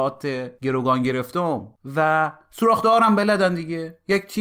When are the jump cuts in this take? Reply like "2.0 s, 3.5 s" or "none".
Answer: none